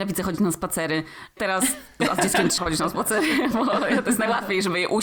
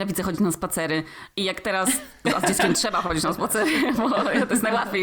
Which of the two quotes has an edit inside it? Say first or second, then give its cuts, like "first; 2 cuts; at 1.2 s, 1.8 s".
first; 2 cuts; at 1.4 s, 2.6 s